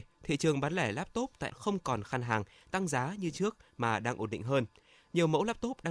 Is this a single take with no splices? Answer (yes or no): no